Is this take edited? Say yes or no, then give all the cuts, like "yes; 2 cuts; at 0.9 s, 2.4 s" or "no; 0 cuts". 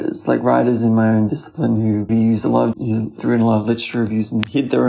yes; 2 cuts; at 2.1 s, 2.7 s